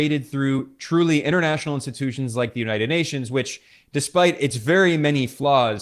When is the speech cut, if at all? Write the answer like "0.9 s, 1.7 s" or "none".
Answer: none